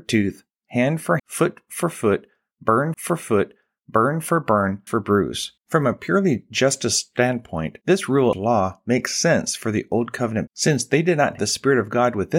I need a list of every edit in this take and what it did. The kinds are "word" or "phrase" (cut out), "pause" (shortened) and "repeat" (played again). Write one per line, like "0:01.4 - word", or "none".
0:01.2 - word
0:02.9 - repeat
0:04.9 - phrase
0:05.6 - pause
0:07.8 - pause
0:08.3 - word
0:10.5 - word
0:11.4 - word

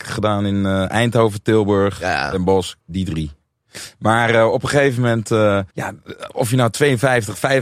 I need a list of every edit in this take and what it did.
0:02.8 - pause
0:05.7 - pause

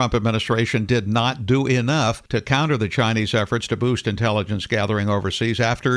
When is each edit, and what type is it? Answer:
0:02.3 - pause

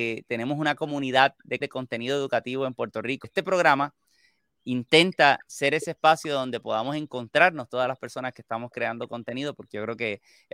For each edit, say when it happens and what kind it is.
0:01.6 - word
0:03.2 - word

